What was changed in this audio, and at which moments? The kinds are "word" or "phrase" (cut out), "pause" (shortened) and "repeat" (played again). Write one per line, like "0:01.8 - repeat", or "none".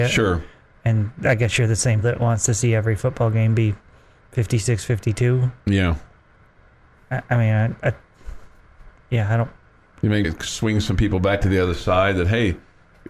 0:02.0 - word
0:10.2 - word